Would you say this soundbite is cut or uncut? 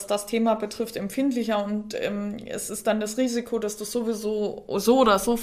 uncut